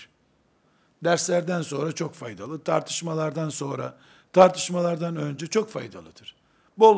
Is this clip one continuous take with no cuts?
yes; 0 cuts

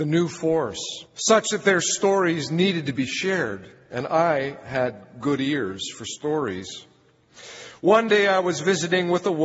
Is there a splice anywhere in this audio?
yes; 1 cut; at 1.1 s

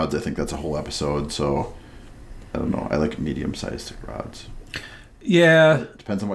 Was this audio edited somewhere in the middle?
no; 0 cuts

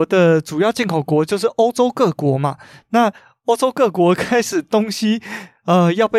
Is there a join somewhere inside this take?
no; 0 cuts

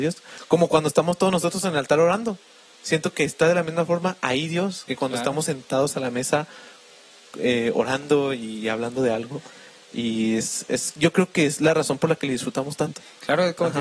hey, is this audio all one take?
yes; 0 cuts

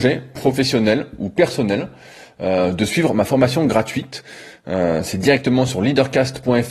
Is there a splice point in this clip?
no; 0 cuts

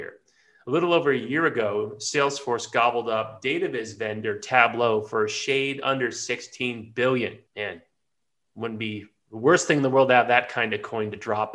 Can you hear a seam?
yes; 1 cut; at 7.5 s

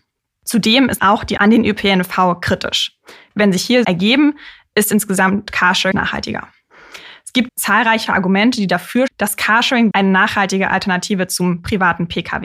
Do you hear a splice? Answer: yes; 8 cuts; at 1.0 s, 1.4 s, 3.8 s, 5.9 s, 7.5 s, 8.1 s, 9.1 s, 9.9 s

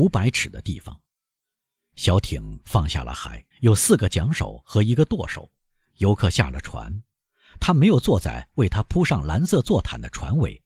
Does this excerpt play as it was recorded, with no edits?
no; 1 cut; at 3.5 s

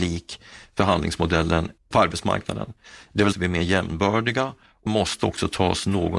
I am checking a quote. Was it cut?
yes; 2 cuts; at 3.3 s, 4.9 s

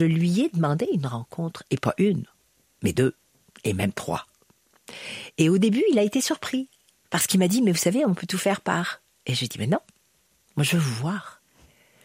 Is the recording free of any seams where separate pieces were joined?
yes; 0 cuts

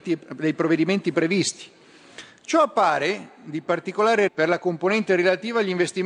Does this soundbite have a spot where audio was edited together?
yes; 1 cut; at 4.3 s

